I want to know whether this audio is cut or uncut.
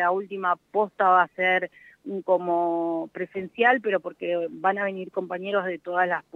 uncut